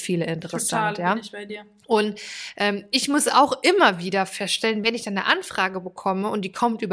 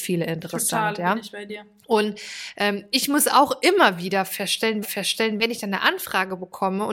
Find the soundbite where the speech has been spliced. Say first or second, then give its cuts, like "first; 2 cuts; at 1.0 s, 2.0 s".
second; 1 cut; at 4.8 s